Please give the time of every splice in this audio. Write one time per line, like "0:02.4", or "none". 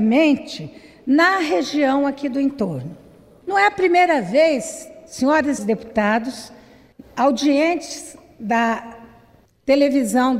0:05.6